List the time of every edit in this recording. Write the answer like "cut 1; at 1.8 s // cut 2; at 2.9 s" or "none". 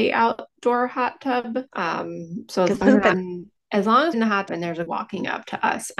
cut 1; at 1.7 s // cut 2; at 2.8 s // cut 3; at 3.1 s // cut 4; at 4.1 s // cut 5; at 4.5 s // cut 6; at 4.9 s